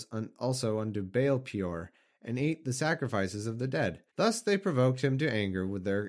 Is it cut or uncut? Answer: cut